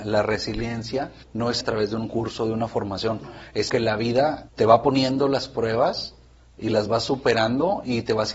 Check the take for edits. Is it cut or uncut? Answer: cut